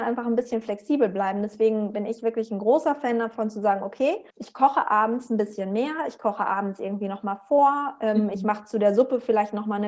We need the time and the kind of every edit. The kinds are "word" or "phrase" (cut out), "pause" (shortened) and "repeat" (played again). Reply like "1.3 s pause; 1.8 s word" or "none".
4.3 s pause